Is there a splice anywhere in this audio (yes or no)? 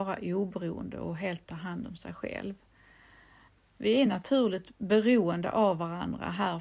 no